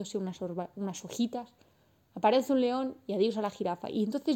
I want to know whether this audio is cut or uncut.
uncut